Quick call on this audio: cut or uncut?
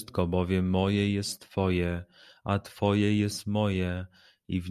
uncut